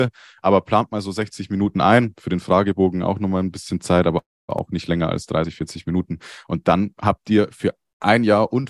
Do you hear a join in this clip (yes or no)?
no